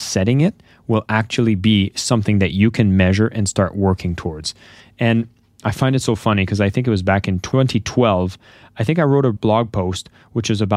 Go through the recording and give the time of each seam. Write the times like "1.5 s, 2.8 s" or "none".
none